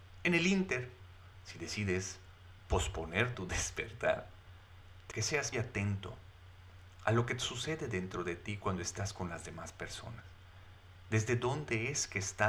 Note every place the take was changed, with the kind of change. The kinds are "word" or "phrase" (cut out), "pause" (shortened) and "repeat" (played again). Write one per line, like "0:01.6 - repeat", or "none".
0:03.3 - word
0:05.1 - word
0:05.5 - word

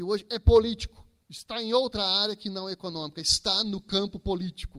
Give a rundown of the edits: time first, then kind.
0:01.2 - pause

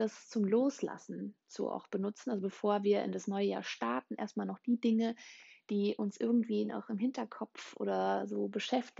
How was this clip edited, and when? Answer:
none

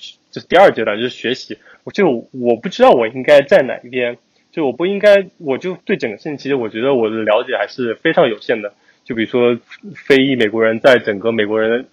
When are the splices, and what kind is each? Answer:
none

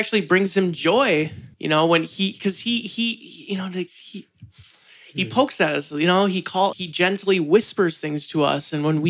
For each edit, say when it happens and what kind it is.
0:01.5 - pause
0:06.7 - word

